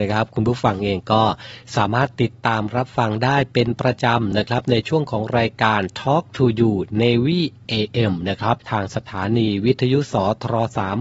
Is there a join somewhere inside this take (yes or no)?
yes